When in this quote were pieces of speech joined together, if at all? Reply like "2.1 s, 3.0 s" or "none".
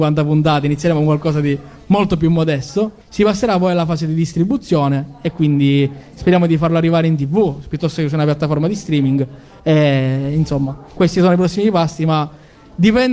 3.0 s